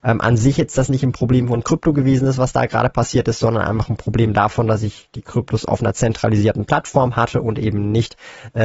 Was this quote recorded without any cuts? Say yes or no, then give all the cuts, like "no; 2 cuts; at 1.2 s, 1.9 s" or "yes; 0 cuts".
yes; 0 cuts